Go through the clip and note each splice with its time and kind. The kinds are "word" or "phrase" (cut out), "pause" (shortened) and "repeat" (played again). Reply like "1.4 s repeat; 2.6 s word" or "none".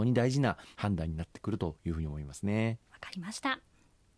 2.8 s pause